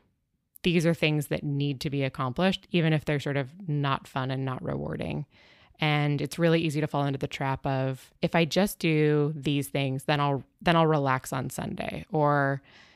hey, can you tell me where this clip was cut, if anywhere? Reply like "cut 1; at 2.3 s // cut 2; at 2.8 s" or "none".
cut 1; at 8.2 s